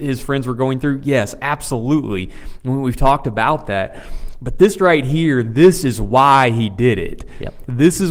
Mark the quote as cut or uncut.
uncut